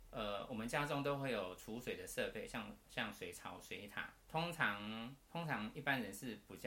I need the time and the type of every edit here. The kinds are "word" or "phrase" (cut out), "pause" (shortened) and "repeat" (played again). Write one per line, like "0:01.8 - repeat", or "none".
0:04.2 - pause
0:05.2 - pause